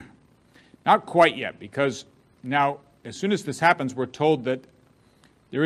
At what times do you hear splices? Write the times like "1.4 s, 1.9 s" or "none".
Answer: none